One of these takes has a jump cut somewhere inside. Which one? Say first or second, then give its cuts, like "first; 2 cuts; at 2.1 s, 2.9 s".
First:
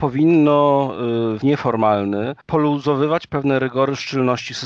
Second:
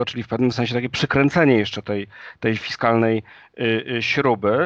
first; 2 cuts; at 1.4 s, 2.4 s